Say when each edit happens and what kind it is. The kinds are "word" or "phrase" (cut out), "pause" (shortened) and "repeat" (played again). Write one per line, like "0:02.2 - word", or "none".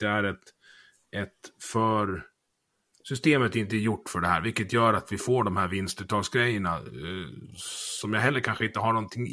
none